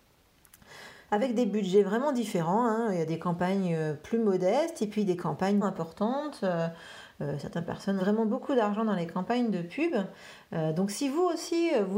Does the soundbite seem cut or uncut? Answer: cut